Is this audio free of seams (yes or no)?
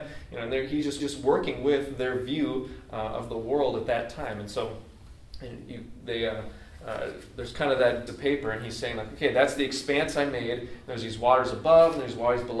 no